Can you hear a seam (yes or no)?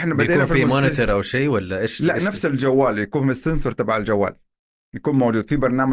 no